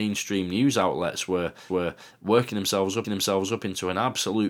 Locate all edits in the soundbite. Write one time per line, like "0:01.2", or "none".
0:01.7
0:03.0